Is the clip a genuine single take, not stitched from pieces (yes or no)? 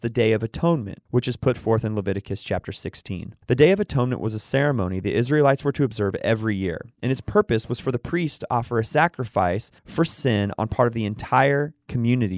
no